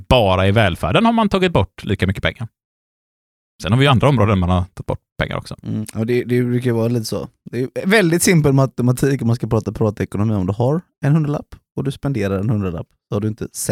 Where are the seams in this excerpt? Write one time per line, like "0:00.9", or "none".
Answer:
none